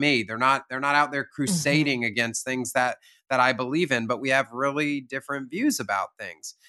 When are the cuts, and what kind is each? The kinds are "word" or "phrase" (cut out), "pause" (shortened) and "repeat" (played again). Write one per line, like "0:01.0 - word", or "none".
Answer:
none